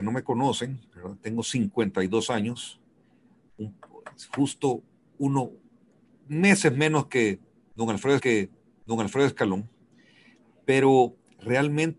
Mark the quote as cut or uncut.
cut